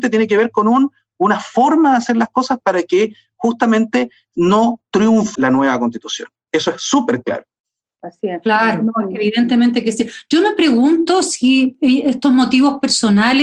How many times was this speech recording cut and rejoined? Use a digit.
1